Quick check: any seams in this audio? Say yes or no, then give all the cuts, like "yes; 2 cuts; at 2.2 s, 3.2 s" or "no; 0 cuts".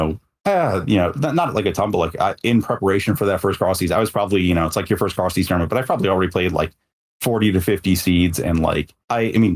no; 0 cuts